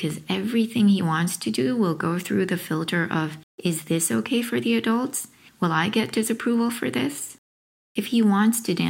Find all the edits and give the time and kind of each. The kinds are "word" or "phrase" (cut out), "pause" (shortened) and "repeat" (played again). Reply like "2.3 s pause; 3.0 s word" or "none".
none